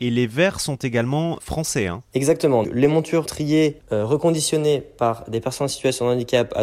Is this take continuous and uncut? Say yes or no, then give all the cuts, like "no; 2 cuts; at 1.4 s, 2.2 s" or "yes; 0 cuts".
no; 4 cuts; at 1.4 s, 2.6 s, 3.3 s, 3.8 s